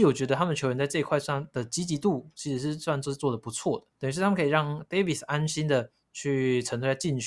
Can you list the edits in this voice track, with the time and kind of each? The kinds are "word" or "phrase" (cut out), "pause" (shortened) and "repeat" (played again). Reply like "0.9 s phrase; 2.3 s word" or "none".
3.9 s pause